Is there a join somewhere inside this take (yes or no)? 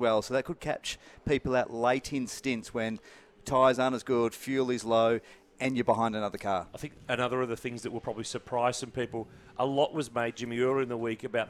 no